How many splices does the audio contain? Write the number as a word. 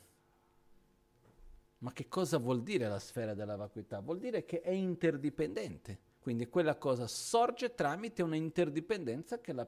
two